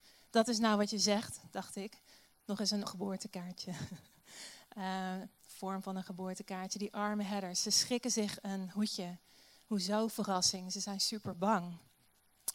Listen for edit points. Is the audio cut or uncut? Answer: cut